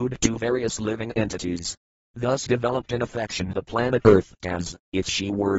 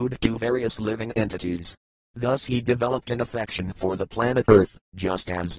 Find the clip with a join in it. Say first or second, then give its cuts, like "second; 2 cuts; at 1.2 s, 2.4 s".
first; 3 cuts; at 2.5 s, 3.5 s, 4.4 s